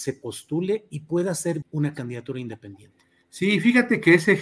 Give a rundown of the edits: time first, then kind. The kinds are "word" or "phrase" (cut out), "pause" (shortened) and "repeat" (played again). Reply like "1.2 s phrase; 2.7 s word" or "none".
1.6 s word